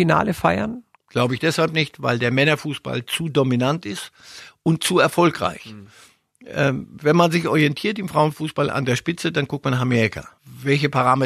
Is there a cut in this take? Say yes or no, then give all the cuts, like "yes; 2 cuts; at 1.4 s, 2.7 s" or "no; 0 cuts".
no; 0 cuts